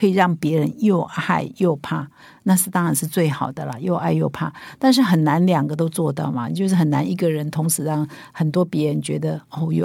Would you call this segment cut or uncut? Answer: uncut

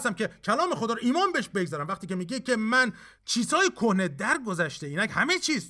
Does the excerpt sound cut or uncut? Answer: uncut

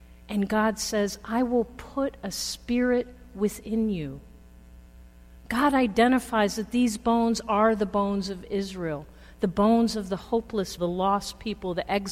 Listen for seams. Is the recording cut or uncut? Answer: cut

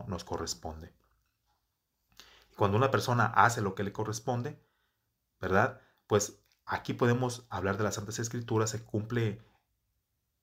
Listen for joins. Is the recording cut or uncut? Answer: uncut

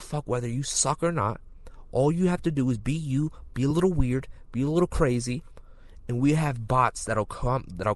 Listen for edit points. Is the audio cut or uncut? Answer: uncut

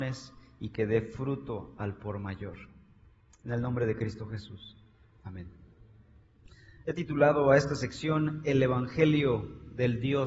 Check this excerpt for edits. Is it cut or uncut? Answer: uncut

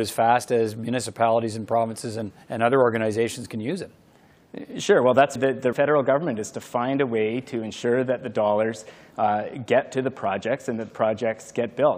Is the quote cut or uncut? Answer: cut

